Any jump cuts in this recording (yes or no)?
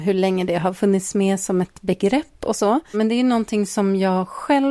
no